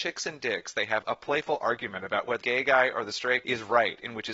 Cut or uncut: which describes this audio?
cut